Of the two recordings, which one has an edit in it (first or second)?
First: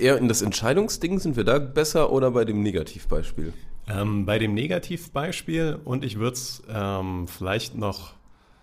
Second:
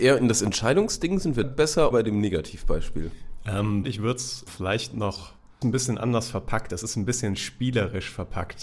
second